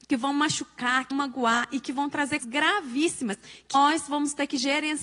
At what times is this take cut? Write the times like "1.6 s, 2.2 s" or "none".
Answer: 1.1 s, 2.4 s, 3.7 s